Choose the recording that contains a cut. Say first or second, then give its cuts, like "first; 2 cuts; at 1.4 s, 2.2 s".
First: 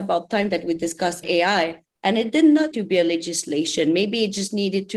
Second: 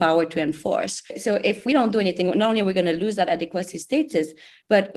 first; 1 cut; at 2.7 s